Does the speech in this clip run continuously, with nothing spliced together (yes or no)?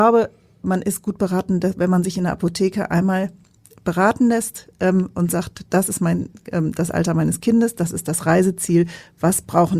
yes